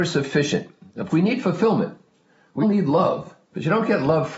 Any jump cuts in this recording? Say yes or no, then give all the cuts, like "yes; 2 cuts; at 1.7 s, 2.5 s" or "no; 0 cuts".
yes; 3 cuts; at 1.1 s, 2.6 s, 3.4 s